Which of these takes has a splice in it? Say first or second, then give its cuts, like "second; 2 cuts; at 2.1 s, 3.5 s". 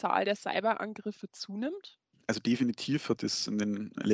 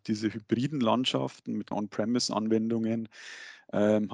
second; 1 cut; at 1.7 s